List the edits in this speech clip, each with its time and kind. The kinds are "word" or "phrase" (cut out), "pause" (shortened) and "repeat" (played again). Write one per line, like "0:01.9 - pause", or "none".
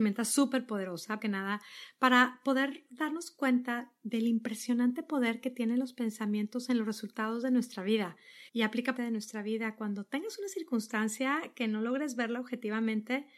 0:01.2 - word
0:08.5 - pause
0:09.0 - phrase